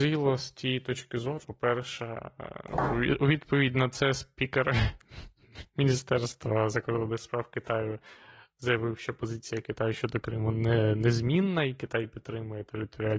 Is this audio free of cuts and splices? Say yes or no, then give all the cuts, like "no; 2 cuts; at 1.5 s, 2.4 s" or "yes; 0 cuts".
no; 1 cut; at 1.4 s